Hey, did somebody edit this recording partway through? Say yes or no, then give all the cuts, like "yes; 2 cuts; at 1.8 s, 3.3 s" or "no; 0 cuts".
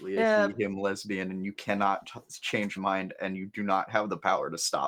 yes; 1 cut; at 2.8 s